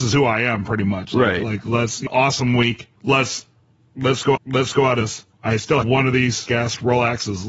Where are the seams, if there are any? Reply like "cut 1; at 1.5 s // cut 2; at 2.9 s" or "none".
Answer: cut 1; at 2.1 s // cut 2; at 3.0 s // cut 3; at 4.4 s // cut 4; at 5.0 s // cut 5; at 5.3 s // cut 6; at 5.8 s // cut 7; at 6.5 s